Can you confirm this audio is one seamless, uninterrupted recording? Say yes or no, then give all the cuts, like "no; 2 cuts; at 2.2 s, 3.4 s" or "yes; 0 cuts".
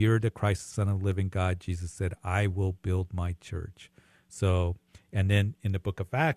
yes; 0 cuts